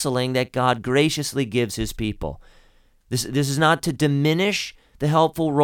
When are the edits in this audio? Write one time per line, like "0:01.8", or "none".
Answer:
none